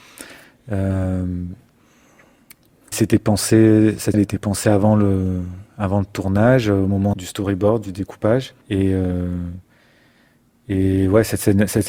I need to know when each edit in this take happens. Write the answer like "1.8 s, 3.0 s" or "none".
2.9 s, 4.1 s, 7.1 s, 8.6 s